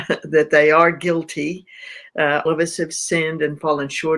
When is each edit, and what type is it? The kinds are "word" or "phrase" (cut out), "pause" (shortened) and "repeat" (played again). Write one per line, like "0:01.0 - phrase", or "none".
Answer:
0:02.5 - word